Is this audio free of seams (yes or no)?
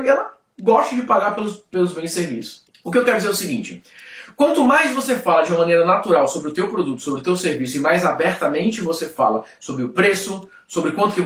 yes